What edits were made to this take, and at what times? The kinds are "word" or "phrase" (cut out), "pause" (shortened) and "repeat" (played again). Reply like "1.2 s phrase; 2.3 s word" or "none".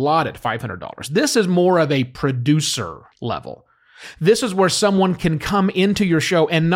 3.1 s pause